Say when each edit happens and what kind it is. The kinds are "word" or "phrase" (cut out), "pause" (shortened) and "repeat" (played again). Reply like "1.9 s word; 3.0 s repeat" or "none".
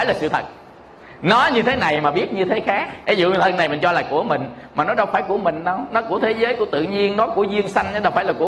3.0 s pause

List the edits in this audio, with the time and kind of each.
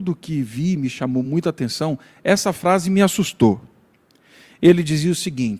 none

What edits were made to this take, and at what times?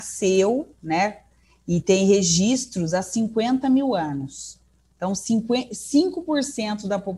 none

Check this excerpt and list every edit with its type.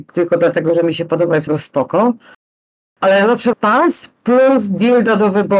1.5 s word; 3.5 s phrase

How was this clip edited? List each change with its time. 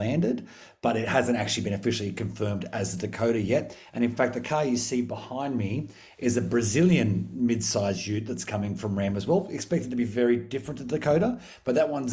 none

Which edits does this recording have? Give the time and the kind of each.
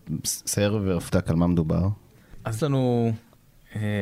1.1 s word; 2.6 s word

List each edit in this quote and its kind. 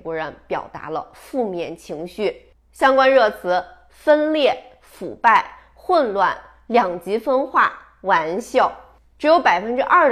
none

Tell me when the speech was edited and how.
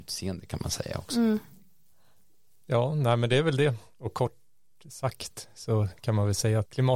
none

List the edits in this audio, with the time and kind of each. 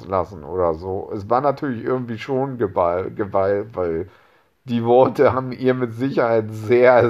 none

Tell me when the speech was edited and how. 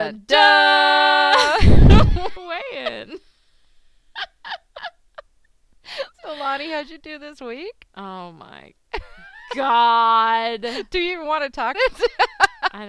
2.4 s word; 6.1 s pause; 11.7 s word

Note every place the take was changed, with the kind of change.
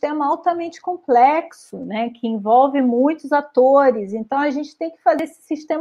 none

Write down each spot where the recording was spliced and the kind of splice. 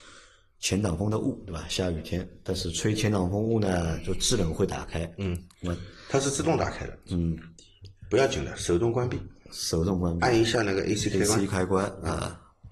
none

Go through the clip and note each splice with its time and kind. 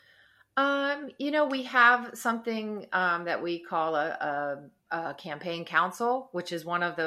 4.8 s pause

